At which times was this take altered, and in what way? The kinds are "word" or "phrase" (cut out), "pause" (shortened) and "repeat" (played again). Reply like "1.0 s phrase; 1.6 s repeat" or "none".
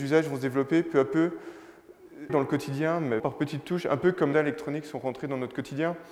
2.3 s phrase; 3.2 s word; 4.3 s phrase